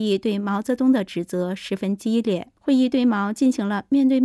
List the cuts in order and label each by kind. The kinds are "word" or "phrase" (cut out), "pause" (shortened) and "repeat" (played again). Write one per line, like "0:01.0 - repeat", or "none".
0:02.6 - pause